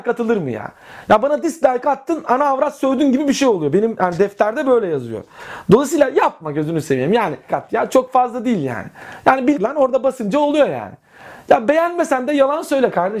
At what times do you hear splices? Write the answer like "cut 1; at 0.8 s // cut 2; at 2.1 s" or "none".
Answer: cut 1; at 7.5 s // cut 2; at 9.5 s